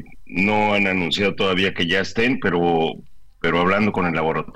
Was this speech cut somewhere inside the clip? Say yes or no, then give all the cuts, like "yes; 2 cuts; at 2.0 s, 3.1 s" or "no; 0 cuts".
no; 0 cuts